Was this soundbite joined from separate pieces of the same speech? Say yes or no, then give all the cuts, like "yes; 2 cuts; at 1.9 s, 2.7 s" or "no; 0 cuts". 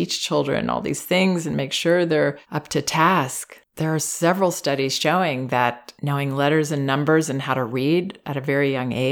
yes; 1 cut; at 3.7 s